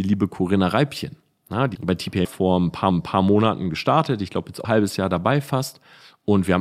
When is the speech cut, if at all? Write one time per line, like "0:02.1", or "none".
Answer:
0:01.7
0:02.2
0:02.9
0:04.6